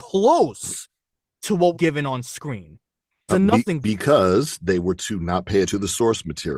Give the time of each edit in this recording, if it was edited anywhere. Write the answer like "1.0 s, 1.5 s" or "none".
1.7 s, 3.3 s, 3.8 s, 5.0 s, 5.7 s